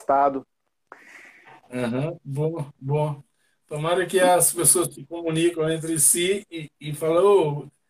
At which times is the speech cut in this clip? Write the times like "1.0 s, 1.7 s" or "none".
none